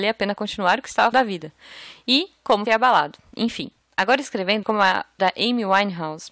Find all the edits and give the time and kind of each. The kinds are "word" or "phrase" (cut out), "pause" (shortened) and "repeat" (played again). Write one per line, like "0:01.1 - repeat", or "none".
0:01.1 - word
0:02.7 - word
0:04.6 - word
0:05.2 - word